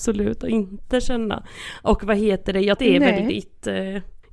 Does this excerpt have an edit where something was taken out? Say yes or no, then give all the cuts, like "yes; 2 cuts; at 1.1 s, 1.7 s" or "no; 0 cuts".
yes; 1 cut; at 2.8 s